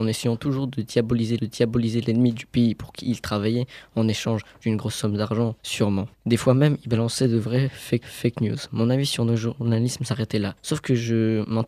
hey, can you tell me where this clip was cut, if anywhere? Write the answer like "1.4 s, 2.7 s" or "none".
1.4 s, 8.0 s, 10.6 s